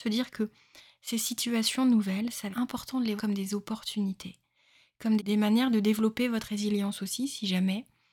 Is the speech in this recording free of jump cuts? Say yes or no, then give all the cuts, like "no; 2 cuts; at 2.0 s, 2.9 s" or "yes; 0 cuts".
no; 3 cuts; at 2.5 s, 3.2 s, 5.2 s